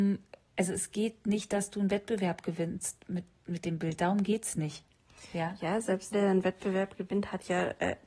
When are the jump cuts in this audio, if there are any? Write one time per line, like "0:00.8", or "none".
0:06.1